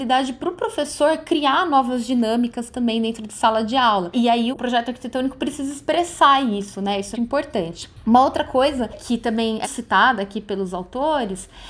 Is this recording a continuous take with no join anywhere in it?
no; 3 cuts; at 4.5 s, 7.1 s, 9.6 s

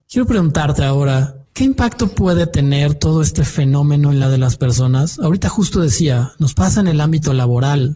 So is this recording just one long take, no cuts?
no; 1 cut; at 4.2 s

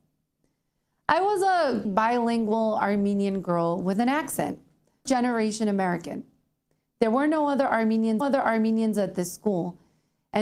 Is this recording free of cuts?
no; 3 cuts; at 1.8 s, 5.1 s, 8.2 s

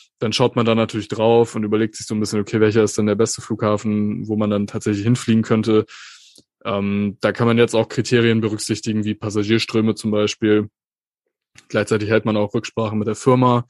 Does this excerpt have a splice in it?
no; 0 cuts

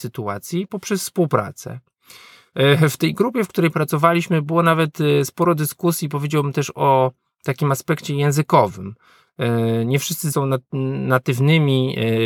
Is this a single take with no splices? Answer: no; 1 cut; at 10.3 s

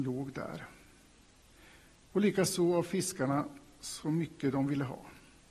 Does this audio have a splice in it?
no; 0 cuts

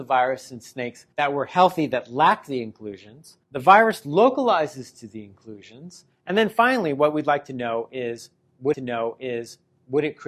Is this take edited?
yes; 3 cuts; at 1.1 s, 3.4 s, 8.7 s

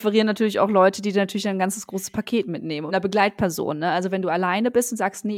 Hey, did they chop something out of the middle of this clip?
yes; 1 cut; at 2.9 s

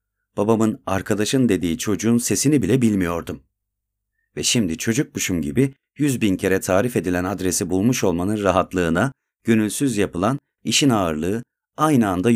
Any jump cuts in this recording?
no; 0 cuts

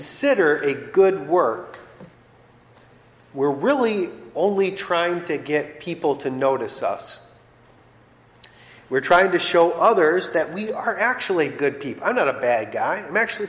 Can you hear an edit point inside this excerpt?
no; 0 cuts

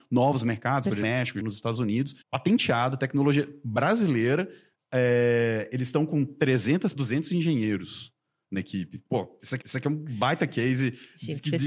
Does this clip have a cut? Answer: yes; 6 cuts; at 1.0 s, 1.4 s, 2.2 s, 4.7 s, 7.0 s, 9.6 s

